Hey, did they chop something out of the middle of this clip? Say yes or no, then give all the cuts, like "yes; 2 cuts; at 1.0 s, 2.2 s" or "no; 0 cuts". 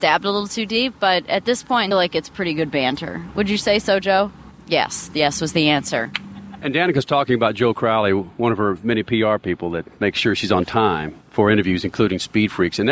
yes; 2 cuts; at 1.9 s, 11.2 s